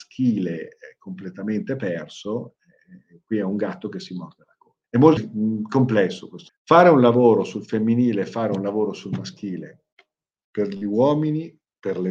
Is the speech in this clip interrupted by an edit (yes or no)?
yes